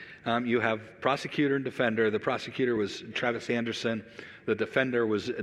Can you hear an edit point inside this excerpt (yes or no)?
no